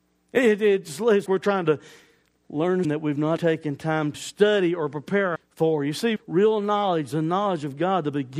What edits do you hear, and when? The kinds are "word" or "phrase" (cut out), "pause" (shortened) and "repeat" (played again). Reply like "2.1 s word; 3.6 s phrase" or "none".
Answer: 1.3 s word; 2.8 s word; 3.4 s word; 4.1 s word; 5.4 s word; 6.2 s word